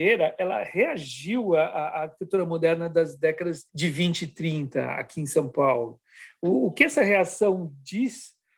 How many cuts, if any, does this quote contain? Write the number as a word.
one